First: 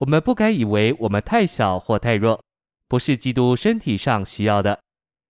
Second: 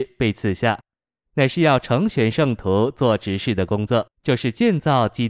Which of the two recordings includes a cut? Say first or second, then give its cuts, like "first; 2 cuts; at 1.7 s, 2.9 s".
second; 1 cut; at 4.1 s